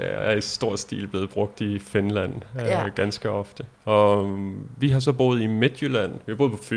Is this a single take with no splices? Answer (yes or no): no